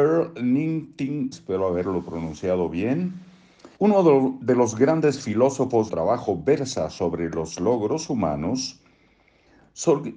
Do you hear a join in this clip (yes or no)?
yes